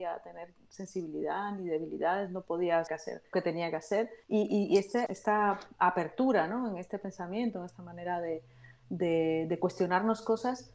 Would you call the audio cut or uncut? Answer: cut